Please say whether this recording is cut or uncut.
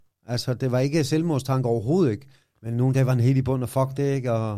uncut